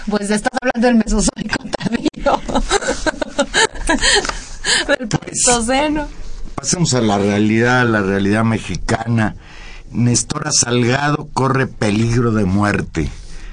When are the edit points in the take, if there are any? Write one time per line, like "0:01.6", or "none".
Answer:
none